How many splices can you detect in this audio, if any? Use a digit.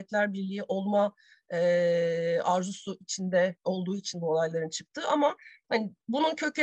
0